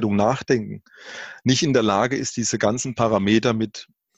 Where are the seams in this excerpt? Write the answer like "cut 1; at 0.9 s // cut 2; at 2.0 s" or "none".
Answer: none